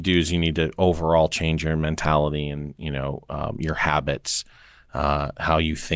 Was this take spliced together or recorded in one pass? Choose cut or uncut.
uncut